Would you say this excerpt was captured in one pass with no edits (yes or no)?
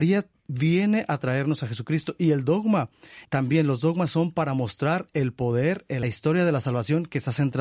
no